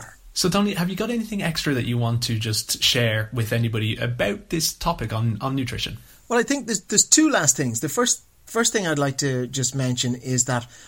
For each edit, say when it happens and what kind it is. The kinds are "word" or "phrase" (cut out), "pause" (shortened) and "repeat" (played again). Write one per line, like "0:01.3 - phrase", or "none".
none